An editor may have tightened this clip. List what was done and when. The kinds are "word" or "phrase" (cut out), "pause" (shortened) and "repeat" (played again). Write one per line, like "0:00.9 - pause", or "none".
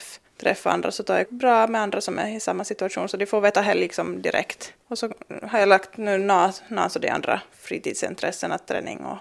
0:01.3 - word